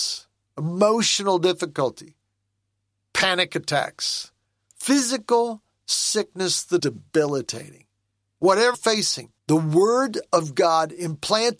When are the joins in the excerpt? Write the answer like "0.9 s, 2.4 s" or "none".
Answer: 6.8 s, 8.7 s, 9.4 s